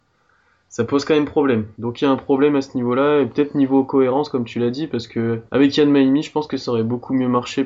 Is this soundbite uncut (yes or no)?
no